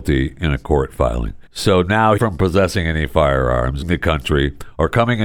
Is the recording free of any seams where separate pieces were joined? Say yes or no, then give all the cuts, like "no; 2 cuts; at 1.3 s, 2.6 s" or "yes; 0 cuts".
no; 3 cuts; at 1.5 s, 2.2 s, 3.8 s